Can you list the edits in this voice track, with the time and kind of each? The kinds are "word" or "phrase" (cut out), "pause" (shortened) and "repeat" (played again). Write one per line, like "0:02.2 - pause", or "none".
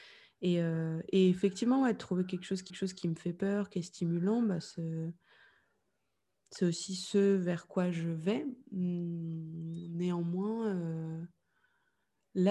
0:02.7 - repeat
0:08.6 - pause